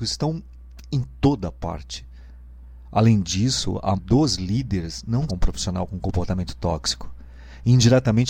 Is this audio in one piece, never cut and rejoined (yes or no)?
no